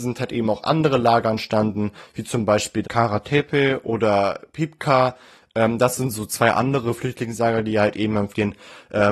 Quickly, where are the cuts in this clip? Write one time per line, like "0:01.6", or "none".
0:02.8